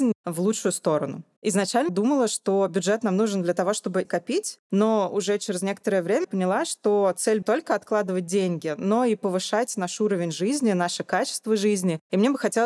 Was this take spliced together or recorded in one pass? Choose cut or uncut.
cut